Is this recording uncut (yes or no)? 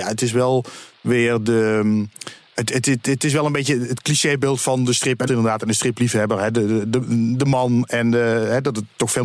no